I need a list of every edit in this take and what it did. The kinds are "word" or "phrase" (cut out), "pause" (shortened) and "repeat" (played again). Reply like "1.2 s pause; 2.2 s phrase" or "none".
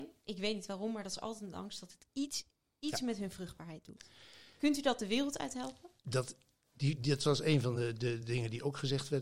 none